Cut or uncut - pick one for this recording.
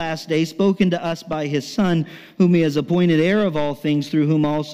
uncut